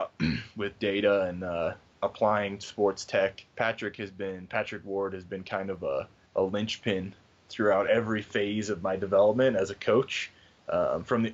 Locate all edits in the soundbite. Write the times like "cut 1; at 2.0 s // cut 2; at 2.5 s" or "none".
cut 1; at 3.5 s // cut 2; at 6.3 s